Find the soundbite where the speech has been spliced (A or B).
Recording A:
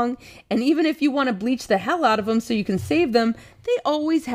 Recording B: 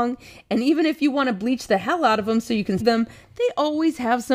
B